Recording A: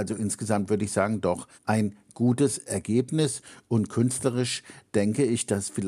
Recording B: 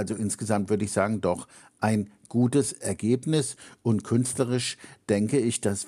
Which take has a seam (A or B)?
A